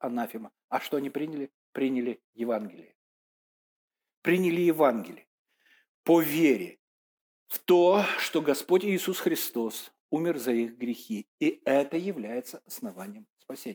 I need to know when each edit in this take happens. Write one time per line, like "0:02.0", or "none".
none